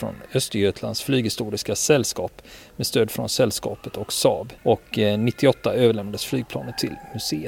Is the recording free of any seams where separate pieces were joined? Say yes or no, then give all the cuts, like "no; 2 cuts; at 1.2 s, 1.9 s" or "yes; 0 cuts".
no; 1 cut; at 4.6 s